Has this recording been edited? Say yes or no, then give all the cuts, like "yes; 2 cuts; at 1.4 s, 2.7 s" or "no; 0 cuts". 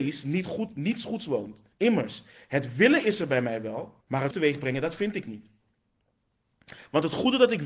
yes; 3 cuts; at 1.7 s, 4.0 s, 4.3 s